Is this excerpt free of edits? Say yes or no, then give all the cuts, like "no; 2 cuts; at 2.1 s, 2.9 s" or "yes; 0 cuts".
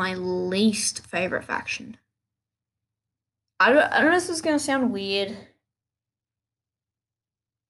yes; 0 cuts